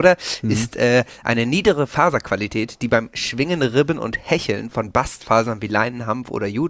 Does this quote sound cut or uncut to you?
uncut